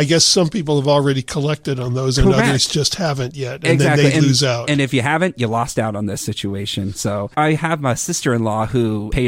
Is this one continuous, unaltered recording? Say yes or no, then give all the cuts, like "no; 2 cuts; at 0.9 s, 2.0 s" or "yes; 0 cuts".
yes; 0 cuts